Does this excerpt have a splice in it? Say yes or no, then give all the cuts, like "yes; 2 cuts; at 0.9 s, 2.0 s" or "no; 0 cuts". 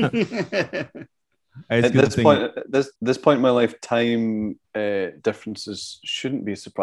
yes; 2 cuts; at 3.0 s, 4.6 s